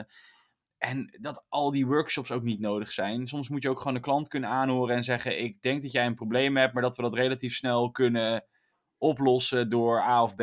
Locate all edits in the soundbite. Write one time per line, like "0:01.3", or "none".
none